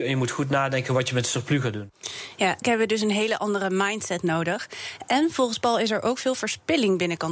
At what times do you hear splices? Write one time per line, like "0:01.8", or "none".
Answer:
0:02.6